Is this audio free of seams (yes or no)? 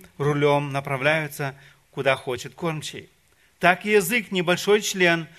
yes